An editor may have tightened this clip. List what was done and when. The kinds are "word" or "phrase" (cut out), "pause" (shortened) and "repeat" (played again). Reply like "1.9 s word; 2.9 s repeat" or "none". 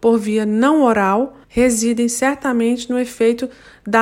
1.4 s pause